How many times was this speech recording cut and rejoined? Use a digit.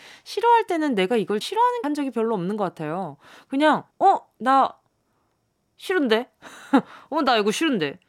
3